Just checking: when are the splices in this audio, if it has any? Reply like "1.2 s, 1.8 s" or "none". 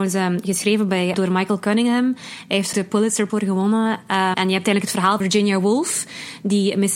1.1 s, 2.7 s, 3.3 s, 4.3 s, 5.2 s